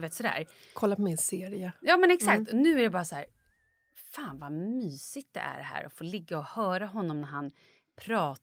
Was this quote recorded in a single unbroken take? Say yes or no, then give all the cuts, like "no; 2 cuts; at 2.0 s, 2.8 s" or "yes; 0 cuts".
yes; 0 cuts